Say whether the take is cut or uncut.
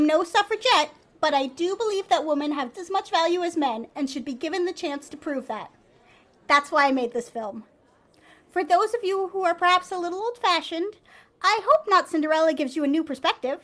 cut